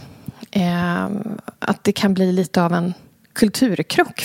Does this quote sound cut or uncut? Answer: uncut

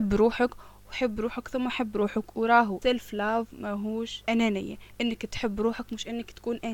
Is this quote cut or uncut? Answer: uncut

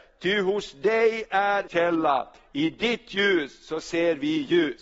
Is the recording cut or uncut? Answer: cut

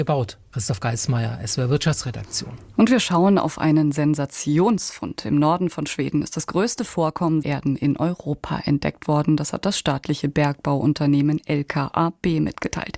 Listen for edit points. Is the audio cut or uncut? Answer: cut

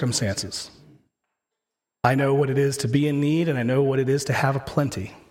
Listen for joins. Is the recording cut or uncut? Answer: uncut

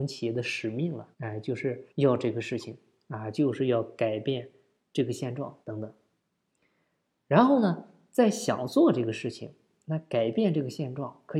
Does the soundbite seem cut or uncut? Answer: cut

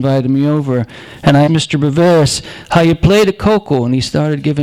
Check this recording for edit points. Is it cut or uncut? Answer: cut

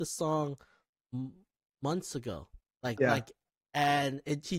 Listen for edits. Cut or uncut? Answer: cut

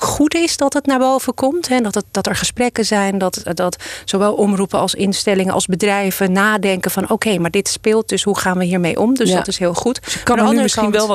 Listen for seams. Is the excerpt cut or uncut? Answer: uncut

